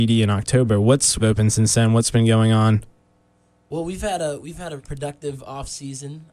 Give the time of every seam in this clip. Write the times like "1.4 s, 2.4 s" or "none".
1.2 s, 4.8 s